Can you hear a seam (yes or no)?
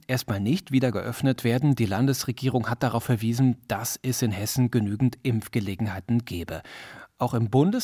no